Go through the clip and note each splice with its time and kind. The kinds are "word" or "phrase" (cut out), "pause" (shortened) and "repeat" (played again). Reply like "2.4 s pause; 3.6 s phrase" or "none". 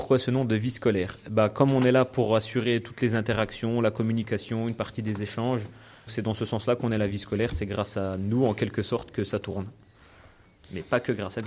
6.1 s word